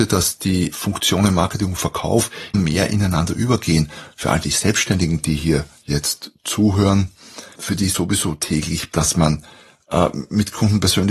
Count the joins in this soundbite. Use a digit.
4